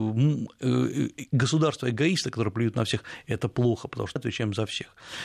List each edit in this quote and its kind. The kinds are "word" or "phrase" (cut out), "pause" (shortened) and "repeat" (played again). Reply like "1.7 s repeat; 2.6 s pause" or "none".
4.2 s word

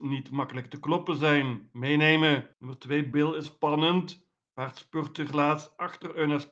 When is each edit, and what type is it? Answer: 2.5 s pause; 3.1 s word; 3.4 s word; 5.3 s word

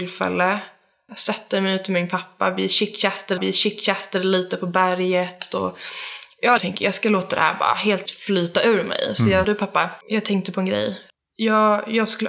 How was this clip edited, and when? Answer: 3.4 s repeat; 6.6 s word; 8.0 s word; 9.4 s phrase; 10.0 s pause; 11.1 s pause

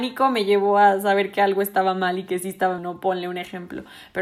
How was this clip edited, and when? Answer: 2.8 s word

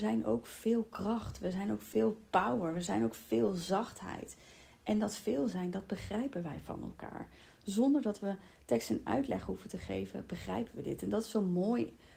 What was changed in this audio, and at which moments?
none

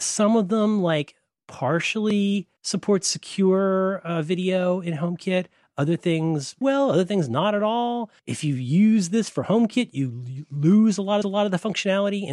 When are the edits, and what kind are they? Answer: 2.6 s pause; 6.6 s word; 8.2 s pause; 11.2 s repeat

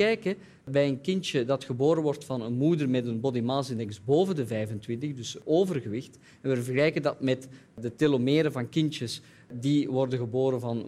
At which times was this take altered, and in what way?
none

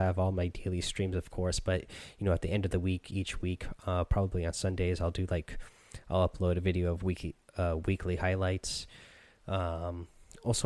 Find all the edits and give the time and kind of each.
none

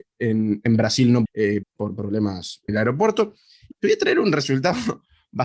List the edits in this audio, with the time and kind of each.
1.3 s word; 1.6 s word; 2.7 s word; 3.7 s word

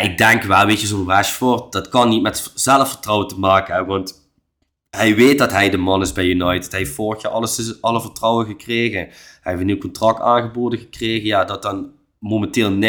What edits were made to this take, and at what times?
none

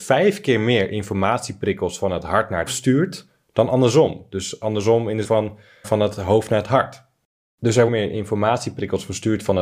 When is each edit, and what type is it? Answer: 2.7 s word; 5.2 s word; 5.8 s word; 7.9 s phrase

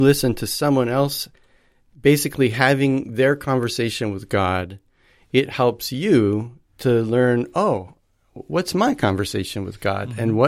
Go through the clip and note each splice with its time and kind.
none

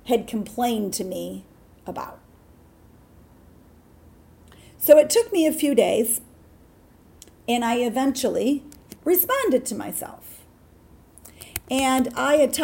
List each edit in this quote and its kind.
none

